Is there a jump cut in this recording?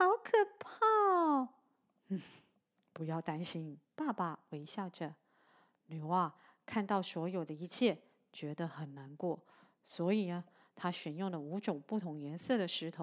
yes; 1 cut; at 3.8 s

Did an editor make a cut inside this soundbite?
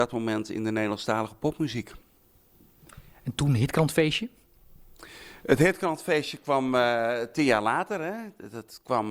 no; 0 cuts

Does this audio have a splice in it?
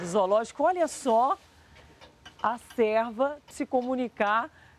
yes; 2 cuts; at 2.4 s, 3.5 s

